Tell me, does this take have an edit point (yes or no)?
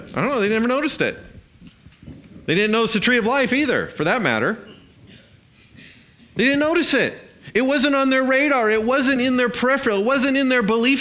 no